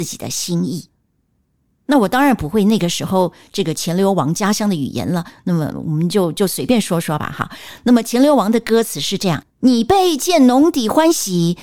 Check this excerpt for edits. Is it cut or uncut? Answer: cut